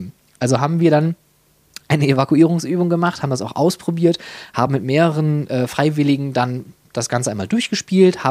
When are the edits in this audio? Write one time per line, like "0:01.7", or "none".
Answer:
none

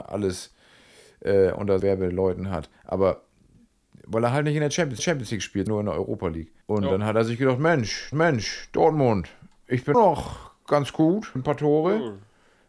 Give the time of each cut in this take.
0:01.8
0:05.0
0:05.7
0:06.6
0:08.1
0:09.9
0:11.4

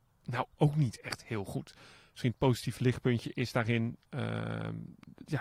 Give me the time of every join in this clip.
none

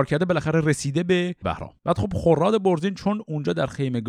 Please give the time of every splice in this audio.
0:01.4
0:01.8

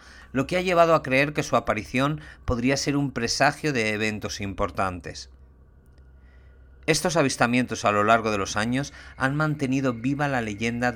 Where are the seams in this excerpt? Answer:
none

